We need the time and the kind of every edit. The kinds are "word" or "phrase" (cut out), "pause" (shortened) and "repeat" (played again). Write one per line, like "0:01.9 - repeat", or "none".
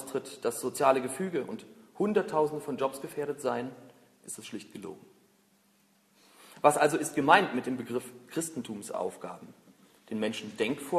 none